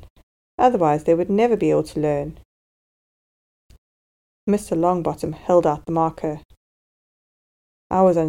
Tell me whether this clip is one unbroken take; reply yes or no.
yes